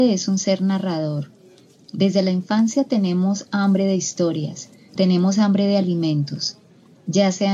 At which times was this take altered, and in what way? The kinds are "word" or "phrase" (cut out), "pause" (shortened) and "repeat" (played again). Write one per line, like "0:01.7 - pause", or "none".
0:05.0 - word